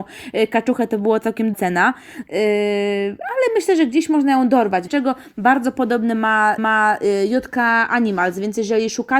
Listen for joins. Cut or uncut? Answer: cut